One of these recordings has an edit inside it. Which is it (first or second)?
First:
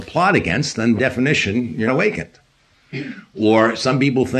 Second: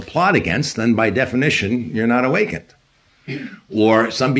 first